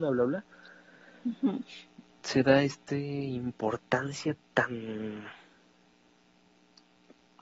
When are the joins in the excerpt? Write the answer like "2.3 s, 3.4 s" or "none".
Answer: none